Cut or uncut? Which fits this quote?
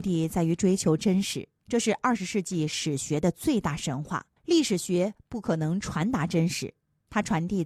cut